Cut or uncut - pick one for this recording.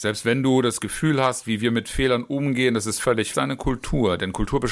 cut